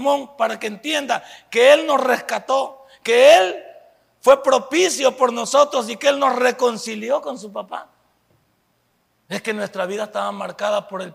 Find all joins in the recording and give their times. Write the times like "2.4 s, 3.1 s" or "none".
none